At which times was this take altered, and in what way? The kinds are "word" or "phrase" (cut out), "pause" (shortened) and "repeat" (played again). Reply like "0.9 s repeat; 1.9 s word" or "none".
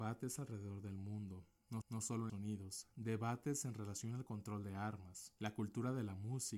1.8 s repeat; 2.3 s word; 2.9 s pause; 5.4 s pause